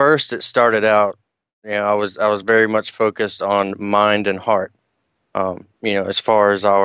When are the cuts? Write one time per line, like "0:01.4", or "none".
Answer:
none